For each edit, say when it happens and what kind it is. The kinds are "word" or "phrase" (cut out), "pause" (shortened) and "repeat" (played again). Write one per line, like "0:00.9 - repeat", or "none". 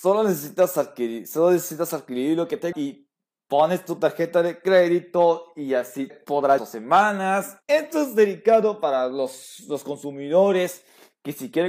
0:02.7 - word
0:06.1 - word
0:06.6 - phrase
0:07.6 - pause